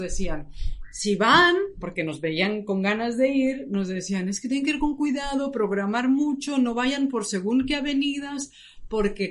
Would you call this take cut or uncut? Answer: uncut